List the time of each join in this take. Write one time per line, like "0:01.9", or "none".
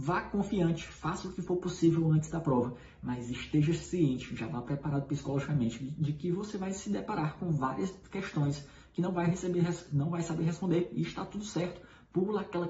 none